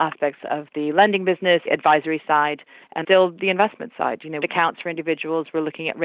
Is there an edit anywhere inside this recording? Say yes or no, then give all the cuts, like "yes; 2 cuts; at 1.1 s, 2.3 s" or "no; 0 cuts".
yes; 3 cuts; at 1.7 s, 3.0 s, 4.4 s